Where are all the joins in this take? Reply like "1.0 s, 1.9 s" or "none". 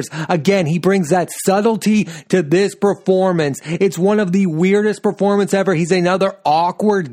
none